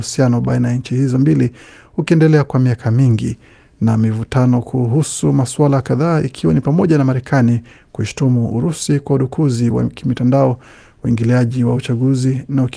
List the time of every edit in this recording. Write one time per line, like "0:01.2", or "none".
none